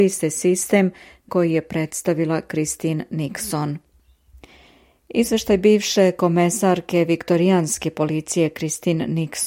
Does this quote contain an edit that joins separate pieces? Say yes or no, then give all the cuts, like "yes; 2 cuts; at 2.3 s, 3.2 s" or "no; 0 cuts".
yes; 1 cut; at 1.3 s